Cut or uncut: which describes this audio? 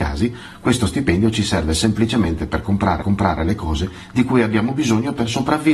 cut